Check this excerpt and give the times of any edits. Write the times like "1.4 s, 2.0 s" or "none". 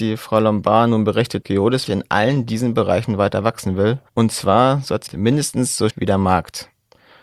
1.4 s, 1.9 s, 4.1 s, 5.1 s, 5.9 s